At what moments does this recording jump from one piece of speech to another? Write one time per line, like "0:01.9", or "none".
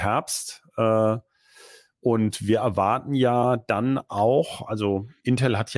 none